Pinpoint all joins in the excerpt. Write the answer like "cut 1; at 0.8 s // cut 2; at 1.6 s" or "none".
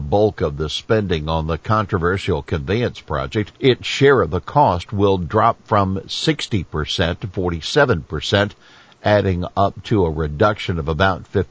cut 1; at 3.6 s